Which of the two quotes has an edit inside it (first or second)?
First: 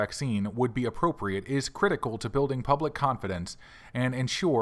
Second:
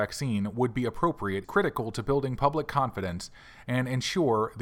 second